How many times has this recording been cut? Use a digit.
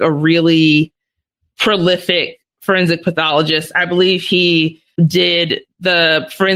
1